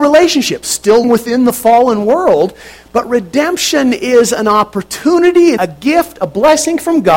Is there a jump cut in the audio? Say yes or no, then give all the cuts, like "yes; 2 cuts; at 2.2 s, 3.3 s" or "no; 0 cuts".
yes; 2 cuts; at 1.0 s, 5.6 s